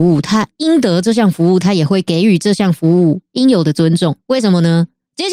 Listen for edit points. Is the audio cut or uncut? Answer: cut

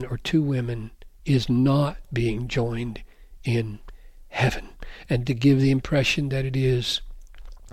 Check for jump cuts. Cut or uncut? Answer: uncut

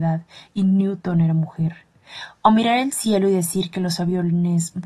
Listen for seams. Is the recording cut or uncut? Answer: uncut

